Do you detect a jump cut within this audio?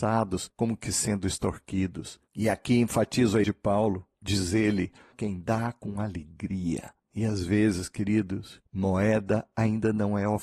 yes; 3 cuts; at 3.4 s, 4.1 s, 5.1 s

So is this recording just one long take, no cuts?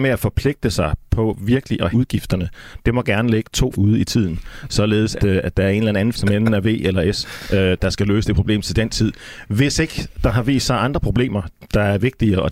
no; 4 cuts; at 1.9 s, 3.7 s, 5.2 s, 6.1 s

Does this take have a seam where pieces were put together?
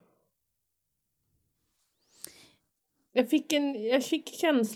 no; 0 cuts

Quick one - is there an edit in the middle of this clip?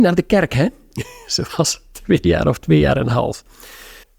no; 0 cuts

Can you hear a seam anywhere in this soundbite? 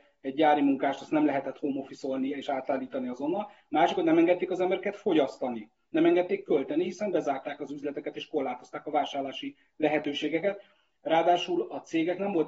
no; 0 cuts

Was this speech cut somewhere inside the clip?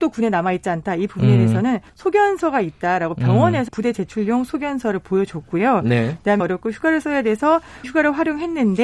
yes; 4 cuts; at 1.9 s, 3.7 s, 6.4 s, 7.8 s

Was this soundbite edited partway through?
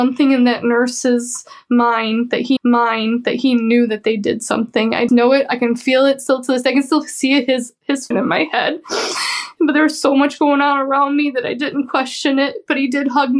yes; 3 cuts; at 2.6 s, 5.1 s, 8.1 s

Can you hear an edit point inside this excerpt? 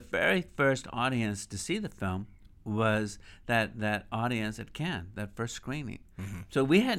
no; 0 cuts

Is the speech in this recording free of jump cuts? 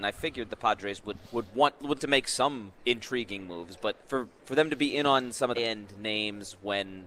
no; 5 cuts; at 1.2 s, 2.0 s, 2.8 s, 4.0 s, 5.5 s

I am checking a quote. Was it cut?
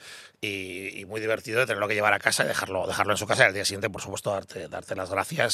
no; 0 cuts

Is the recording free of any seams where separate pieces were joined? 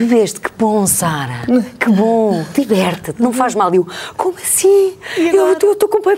yes; 0 cuts

